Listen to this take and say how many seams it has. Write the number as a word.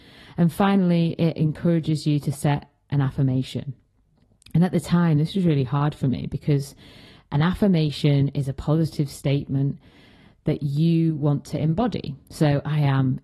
zero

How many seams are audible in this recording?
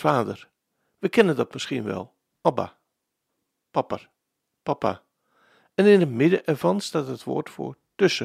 zero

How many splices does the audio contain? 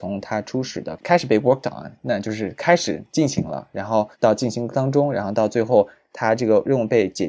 one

